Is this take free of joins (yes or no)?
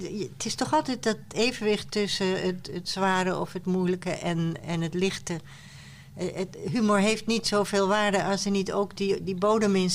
yes